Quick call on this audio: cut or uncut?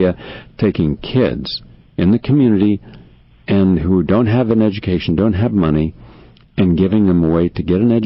uncut